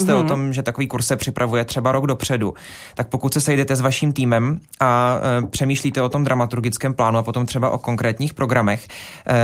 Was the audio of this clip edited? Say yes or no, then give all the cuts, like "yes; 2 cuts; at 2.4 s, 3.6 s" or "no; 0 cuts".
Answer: no; 0 cuts